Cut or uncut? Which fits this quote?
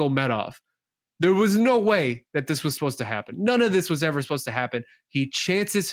uncut